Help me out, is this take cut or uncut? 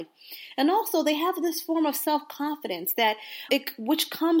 cut